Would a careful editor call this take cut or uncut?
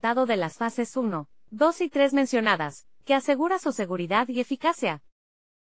uncut